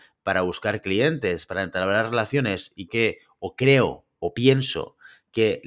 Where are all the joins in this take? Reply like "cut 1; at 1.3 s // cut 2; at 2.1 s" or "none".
cut 1; at 2.9 s